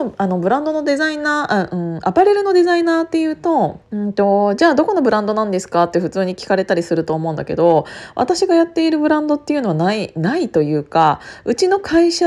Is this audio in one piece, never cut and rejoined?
no; 1 cut; at 3.8 s

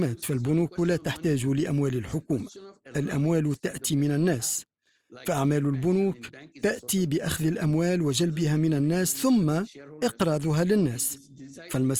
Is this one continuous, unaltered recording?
yes; 0 cuts

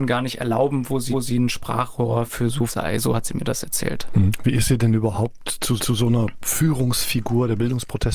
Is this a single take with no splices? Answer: no; 3 cuts; at 1.1 s, 2.7 s, 5.8 s

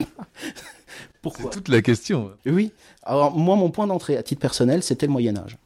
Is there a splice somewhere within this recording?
yes; 1 cut; at 2.4 s

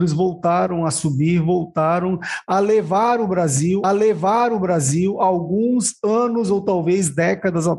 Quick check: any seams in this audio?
yes; 1 cut; at 3.8 s

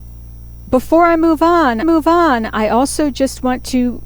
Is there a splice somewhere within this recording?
yes; 1 cut; at 1.8 s

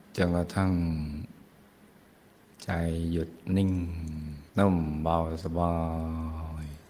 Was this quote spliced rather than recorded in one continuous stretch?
yes; 1 cut; at 4.5 s

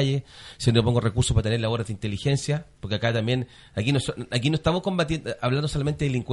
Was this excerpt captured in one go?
yes; 0 cuts

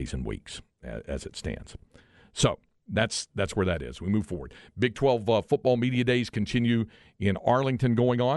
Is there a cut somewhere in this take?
no; 0 cuts

